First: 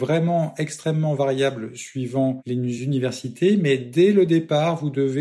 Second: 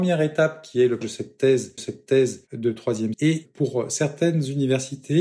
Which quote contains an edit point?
second; 3 cuts; at 1.0 s, 1.8 s, 3.1 s

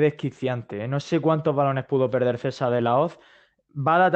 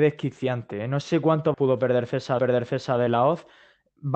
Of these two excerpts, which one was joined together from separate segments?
second; 2 cuts; at 1.5 s, 2.4 s

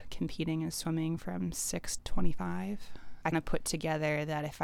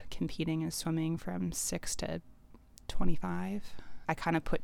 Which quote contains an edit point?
first; 2 cuts; at 2.0 s, 3.3 s

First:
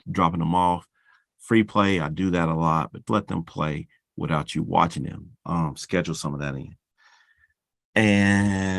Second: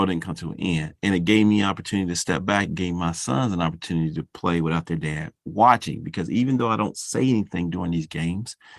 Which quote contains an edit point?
first; 1 cut; at 3.1 s

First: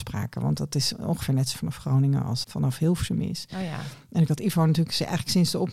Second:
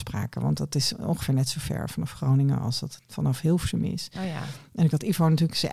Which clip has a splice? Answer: first; 2 cuts; at 1.5 s, 2.4 s

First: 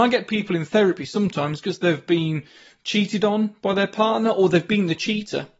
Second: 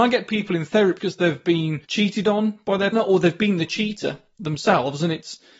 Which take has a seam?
second; 3 cuts; at 1.0 s, 1.8 s, 2.9 s

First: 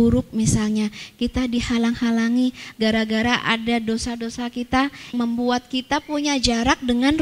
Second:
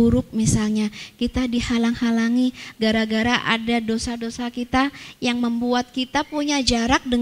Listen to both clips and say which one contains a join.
first; 1 cut; at 5.1 s

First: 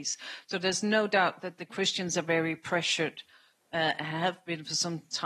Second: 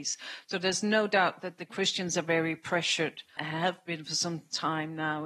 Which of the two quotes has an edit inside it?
second; 1 cut; at 3.4 s

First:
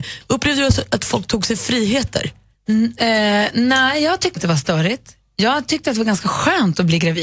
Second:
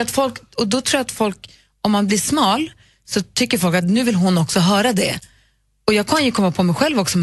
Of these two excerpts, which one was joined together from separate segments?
first; 2 cuts; at 2.5 s, 4.4 s

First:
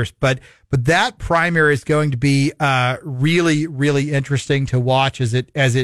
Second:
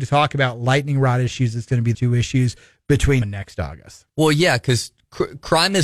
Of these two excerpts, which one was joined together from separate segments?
second; 3 cuts; at 1.9 s, 3.2 s, 4.1 s

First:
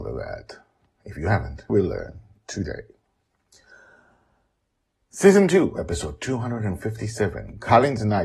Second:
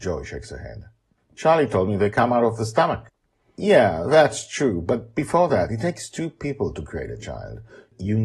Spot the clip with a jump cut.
first; 1 cut; at 1.7 s

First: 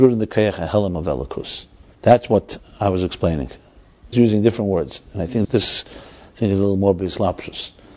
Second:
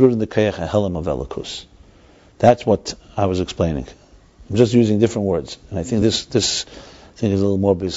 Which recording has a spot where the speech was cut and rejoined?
first; 3 cuts; at 1.9 s, 4.1 s, 5.4 s

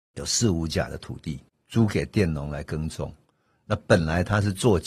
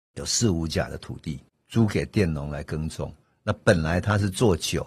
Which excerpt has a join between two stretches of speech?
second; 1 cut; at 3.2 s

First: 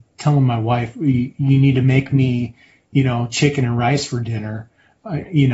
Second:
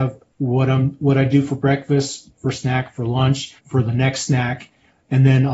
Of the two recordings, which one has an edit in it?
second; 1 cut; at 3.6 s

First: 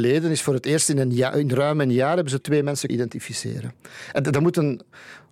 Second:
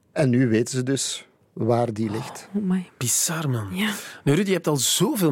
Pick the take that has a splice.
first; 2 cuts; at 2.4 s, 2.9 s

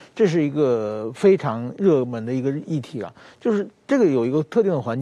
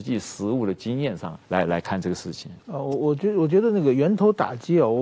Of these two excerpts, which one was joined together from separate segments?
second; 1 cut; at 1.4 s

